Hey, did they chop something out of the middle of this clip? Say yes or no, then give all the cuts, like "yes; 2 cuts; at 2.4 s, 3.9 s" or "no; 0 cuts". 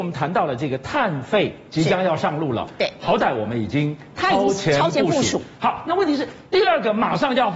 no; 0 cuts